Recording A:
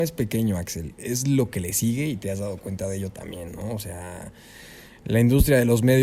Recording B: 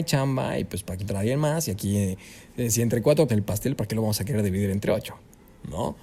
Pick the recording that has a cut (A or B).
B